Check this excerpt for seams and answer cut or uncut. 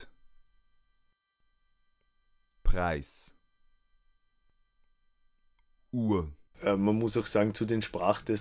cut